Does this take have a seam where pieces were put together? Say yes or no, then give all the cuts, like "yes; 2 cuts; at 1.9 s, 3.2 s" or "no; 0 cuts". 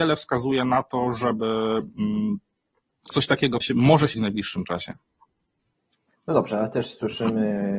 yes; 3 cuts; at 3.1 s, 3.6 s, 4.1 s